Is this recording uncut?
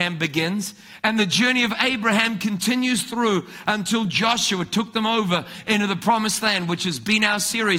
yes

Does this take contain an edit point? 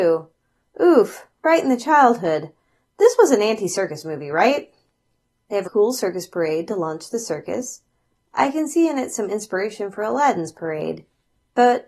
yes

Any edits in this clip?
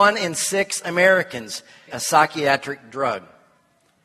yes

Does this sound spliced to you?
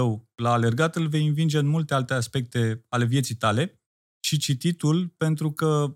yes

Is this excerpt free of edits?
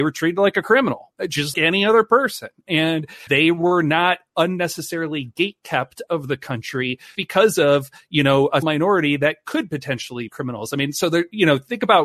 no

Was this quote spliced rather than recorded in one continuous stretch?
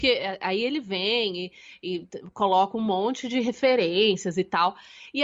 no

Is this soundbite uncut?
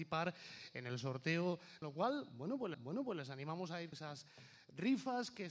no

